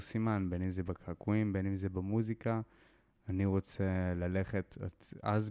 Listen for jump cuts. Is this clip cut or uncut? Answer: uncut